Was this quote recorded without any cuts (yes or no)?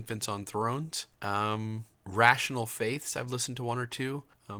no